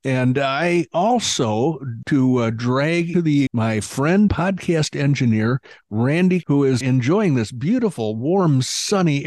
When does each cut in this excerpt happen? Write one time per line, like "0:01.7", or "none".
0:02.0
0:03.1
0:03.5
0:04.3
0:06.4
0:06.8